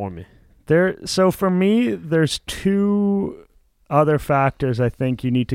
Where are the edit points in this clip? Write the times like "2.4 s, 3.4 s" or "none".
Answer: none